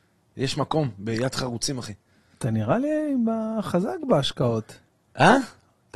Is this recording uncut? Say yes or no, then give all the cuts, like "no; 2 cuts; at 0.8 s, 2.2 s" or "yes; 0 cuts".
yes; 0 cuts